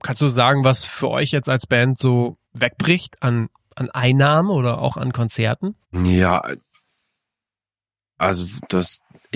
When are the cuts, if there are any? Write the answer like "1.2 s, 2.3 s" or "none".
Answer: 2.4 s, 5.8 s